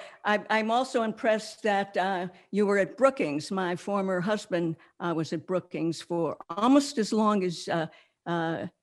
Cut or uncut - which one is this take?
uncut